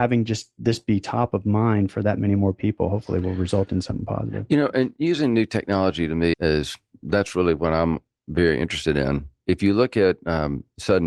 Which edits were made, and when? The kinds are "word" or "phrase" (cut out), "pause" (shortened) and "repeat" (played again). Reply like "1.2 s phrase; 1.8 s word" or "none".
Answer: 6.3 s word